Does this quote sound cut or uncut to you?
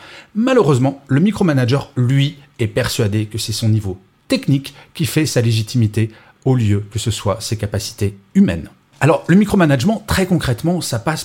uncut